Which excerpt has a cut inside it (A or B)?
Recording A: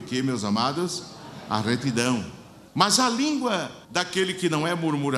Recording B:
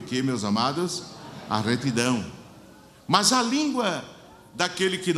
A